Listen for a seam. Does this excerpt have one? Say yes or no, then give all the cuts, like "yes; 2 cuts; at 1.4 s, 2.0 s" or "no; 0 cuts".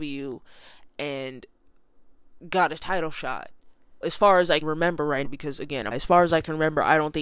yes; 4 cuts; at 4.0 s, 4.6 s, 5.2 s, 5.9 s